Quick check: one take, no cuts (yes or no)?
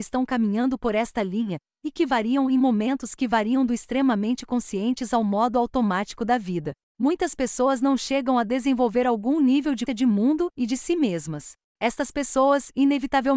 no